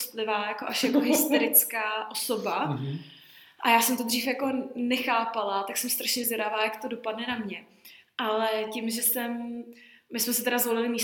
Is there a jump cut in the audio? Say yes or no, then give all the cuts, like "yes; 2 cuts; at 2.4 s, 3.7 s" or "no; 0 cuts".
no; 0 cuts